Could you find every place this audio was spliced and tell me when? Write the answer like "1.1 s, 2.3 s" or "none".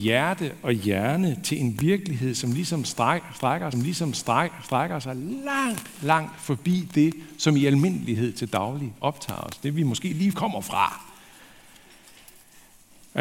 3.7 s, 10.3 s